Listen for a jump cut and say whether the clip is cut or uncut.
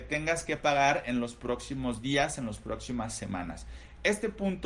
uncut